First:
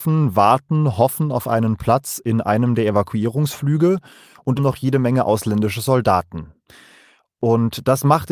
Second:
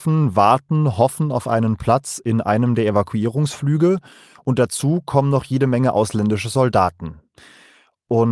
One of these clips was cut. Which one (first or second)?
first